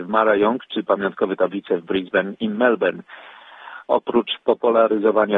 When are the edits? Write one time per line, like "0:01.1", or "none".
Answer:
none